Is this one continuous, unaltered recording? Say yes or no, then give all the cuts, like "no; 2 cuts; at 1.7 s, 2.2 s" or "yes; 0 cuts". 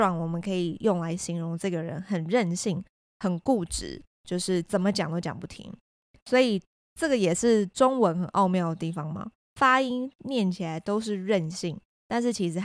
yes; 0 cuts